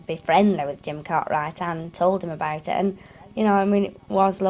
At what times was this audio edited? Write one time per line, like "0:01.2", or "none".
none